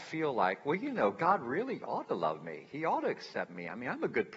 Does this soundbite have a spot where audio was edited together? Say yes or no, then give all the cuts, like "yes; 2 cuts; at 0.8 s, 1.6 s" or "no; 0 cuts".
no; 0 cuts